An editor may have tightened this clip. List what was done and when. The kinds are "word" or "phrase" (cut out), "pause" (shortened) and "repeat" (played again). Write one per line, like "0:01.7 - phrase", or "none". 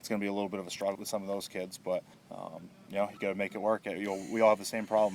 0:00.9 - word
0:02.1 - pause

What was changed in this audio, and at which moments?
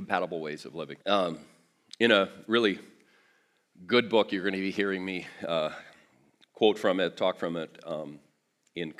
0:01.0 - pause

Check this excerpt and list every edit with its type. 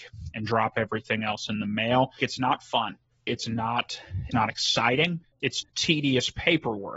0:02.2 - word
0:03.3 - word
0:04.3 - word
0:05.6 - word

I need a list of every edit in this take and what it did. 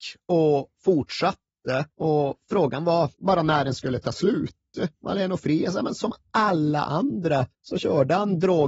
0:01.9 - pause
0:03.1 - pause
0:04.9 - pause
0:07.5 - pause

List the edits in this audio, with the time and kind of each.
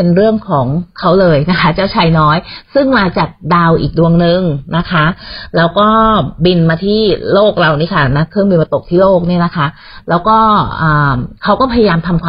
0:11.4 - pause

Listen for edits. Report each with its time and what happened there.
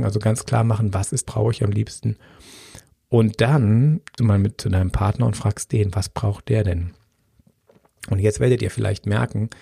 0:01.2 - phrase
0:04.2 - word

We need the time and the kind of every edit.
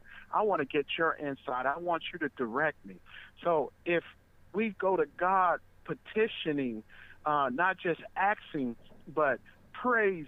none

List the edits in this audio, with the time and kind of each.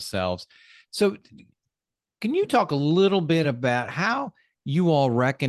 none

